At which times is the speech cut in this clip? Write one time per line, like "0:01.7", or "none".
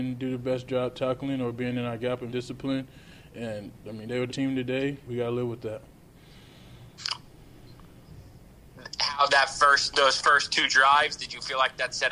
0:02.3
0:04.3
0:05.1
0:09.3
0:09.9